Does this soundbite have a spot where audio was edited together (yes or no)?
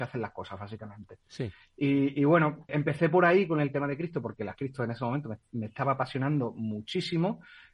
yes